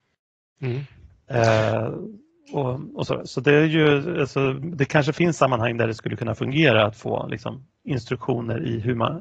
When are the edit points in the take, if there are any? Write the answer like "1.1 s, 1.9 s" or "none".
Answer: none